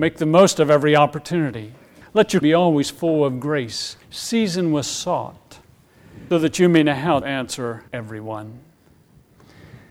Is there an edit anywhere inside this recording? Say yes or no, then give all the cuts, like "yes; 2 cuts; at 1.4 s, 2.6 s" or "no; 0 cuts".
yes; 6 cuts; at 2.0 s, 2.4 s, 4.0 s, 6.3 s, 7.2 s, 7.9 s